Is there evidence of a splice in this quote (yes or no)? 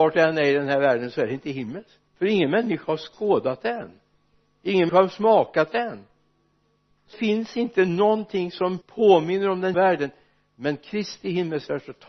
yes